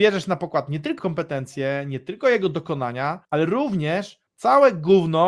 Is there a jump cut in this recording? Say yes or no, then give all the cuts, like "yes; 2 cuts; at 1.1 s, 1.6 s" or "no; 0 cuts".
yes; 3 cuts; at 1.0 s, 3.2 s, 4.3 s